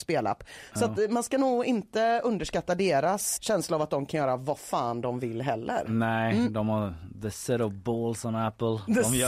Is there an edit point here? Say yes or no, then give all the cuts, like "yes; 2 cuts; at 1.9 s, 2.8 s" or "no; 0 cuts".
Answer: yes; 1 cut; at 3.4 s